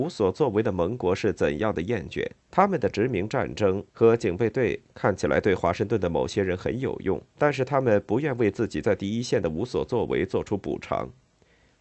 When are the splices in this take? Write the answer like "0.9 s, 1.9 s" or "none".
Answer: 2.4 s, 3.9 s, 7.3 s